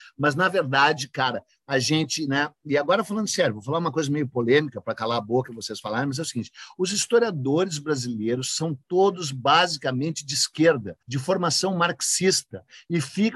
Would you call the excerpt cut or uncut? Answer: cut